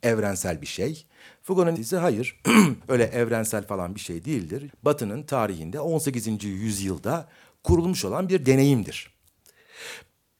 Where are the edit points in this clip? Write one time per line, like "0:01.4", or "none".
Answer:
0:01.8
0:02.8
0:04.7

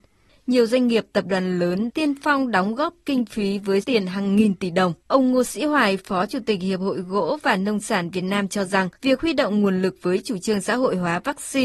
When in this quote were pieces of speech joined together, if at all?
0:01.9
0:03.8
0:05.0
0:08.9

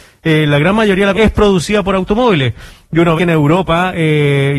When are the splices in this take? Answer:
0:01.1
0:03.2

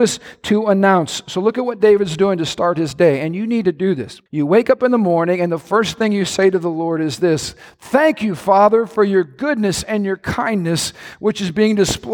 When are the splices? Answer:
0:04.3

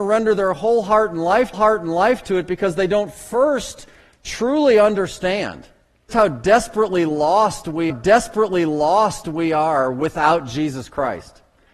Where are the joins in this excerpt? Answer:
0:01.5
0:06.1
0:07.9

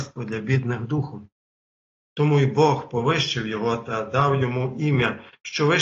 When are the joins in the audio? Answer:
none

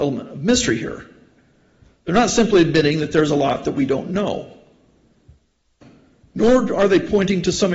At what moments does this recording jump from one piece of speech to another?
none

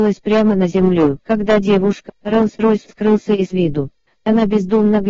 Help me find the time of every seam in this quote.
0:01.2
0:02.1
0:02.9

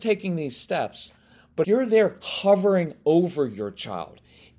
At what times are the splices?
0:01.6

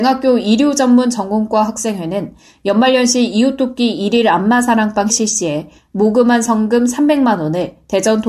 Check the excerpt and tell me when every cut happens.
0:05.1

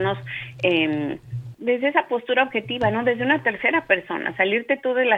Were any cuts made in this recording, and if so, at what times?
0:01.5

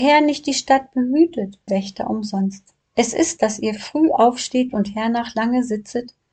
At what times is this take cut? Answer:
0:01.7
0:02.8
0:03.4

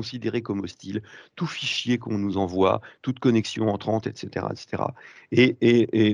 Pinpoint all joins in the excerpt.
none

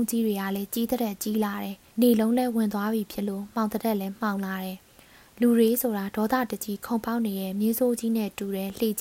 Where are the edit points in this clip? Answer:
0:01.9
0:04.8

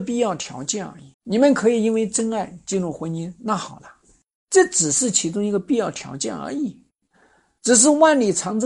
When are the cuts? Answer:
0:01.1

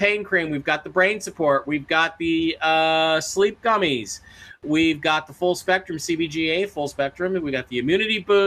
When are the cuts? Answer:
none

